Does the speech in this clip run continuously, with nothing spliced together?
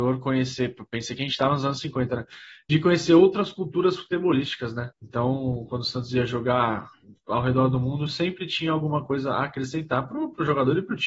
no; 1 cut; at 4.9 s

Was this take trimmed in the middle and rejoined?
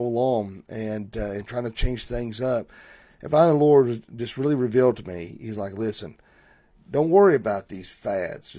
no; 0 cuts

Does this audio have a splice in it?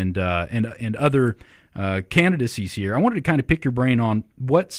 no; 0 cuts

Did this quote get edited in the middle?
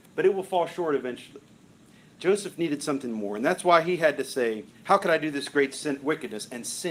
yes; 1 cut; at 4.7 s

